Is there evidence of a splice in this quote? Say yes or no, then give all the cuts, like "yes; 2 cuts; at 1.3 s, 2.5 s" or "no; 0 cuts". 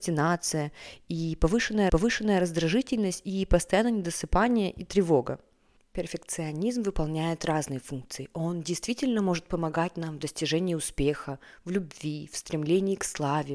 yes; 1 cut; at 1.9 s